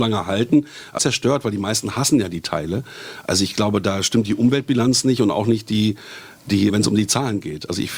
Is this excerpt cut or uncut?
cut